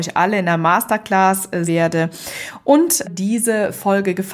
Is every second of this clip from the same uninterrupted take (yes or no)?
no